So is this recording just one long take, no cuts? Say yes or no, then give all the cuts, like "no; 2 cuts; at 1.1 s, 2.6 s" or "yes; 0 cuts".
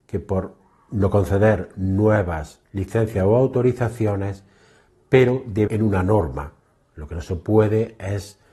no; 2 cuts; at 2.6 s, 5.7 s